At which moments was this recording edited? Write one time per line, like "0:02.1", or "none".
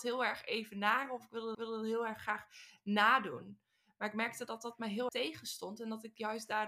0:01.5
0:05.1

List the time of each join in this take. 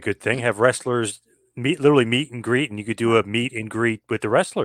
none

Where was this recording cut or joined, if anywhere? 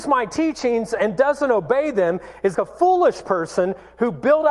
0:02.5

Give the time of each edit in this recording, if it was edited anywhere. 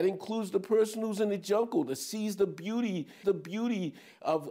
0:03.2

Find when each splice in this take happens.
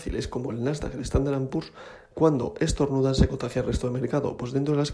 none

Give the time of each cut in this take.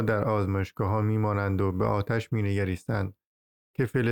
none

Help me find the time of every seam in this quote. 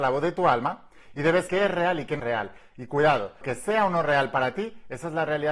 0:01.5
0:02.2
0:03.4

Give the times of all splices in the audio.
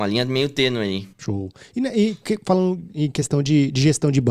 0:01.1

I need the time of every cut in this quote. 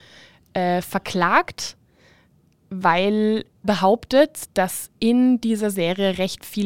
0:03.6

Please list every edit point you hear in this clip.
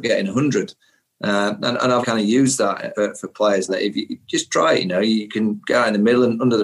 0:02.0
0:02.9
0:03.7

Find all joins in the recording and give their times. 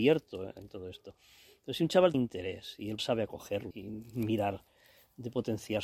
0:02.1
0:03.0
0:03.7

